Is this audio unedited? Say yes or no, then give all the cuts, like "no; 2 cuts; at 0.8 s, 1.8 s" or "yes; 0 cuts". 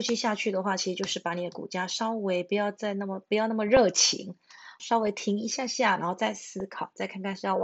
no; 1 cut; at 4.8 s